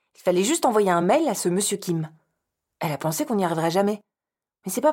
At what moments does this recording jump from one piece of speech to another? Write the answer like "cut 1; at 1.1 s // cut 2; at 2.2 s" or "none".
none

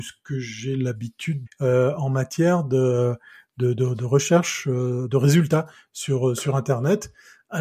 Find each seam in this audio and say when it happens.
cut 1; at 1.5 s

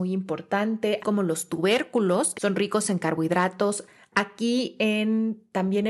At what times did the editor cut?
cut 1; at 1.0 s // cut 2; at 2.3 s

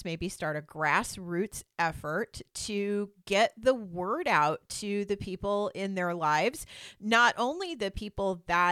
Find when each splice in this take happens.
none

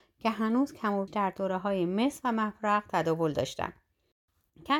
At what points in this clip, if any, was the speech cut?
cut 1; at 1.1 s

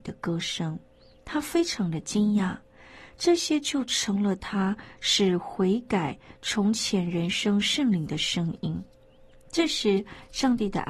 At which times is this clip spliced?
none

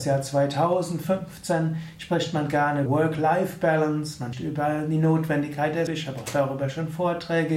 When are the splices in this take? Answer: cut 1; at 2.9 s // cut 2; at 4.3 s // cut 3; at 5.9 s

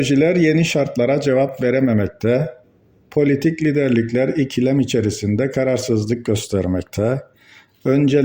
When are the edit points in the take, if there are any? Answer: none

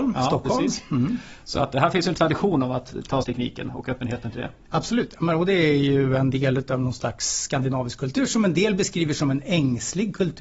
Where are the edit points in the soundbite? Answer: cut 1; at 3.2 s

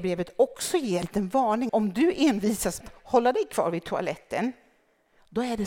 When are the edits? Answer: cut 1; at 1.0 s // cut 2; at 1.7 s // cut 3; at 2.8 s

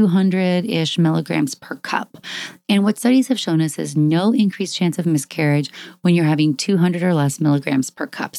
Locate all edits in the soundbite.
none

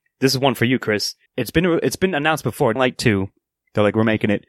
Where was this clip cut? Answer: cut 1; at 1.3 s // cut 2; at 2.8 s

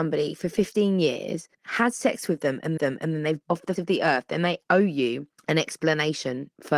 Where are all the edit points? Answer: cut 1; at 1.5 s // cut 2; at 2.8 s // cut 3; at 3.4 s // cut 4; at 3.8 s // cut 5; at 4.7 s // cut 6; at 5.4 s

